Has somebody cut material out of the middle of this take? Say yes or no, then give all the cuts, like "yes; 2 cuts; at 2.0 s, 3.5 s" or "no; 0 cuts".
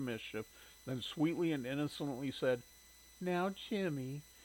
no; 0 cuts